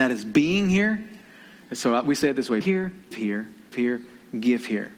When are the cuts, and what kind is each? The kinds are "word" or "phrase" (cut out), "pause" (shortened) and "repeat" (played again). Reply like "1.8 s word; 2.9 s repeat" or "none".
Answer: 2.6 s word; 3.1 s word; 3.7 s word